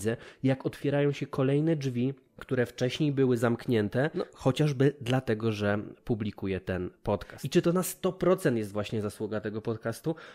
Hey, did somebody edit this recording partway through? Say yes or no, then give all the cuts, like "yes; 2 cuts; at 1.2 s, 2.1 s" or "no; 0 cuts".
no; 0 cuts